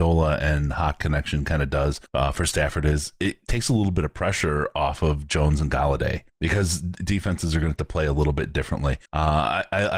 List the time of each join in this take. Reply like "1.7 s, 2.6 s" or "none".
2.1 s, 6.3 s, 9.1 s